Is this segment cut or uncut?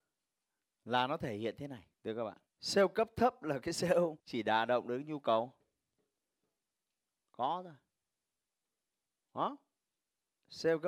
cut